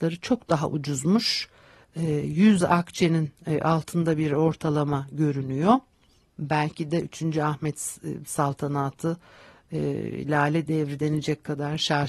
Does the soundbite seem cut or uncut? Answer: uncut